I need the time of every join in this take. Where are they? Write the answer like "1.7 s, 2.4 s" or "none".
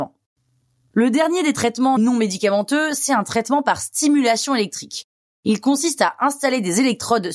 2.0 s